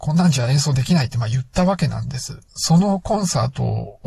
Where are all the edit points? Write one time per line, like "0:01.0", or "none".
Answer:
0:02.5